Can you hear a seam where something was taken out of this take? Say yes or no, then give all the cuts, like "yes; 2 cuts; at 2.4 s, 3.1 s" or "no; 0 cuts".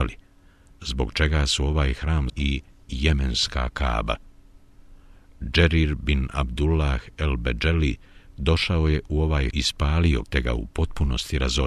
yes; 3 cuts; at 2.3 s, 9.5 s, 10.2 s